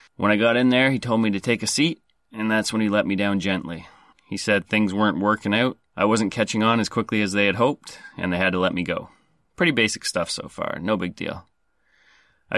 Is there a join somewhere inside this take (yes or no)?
yes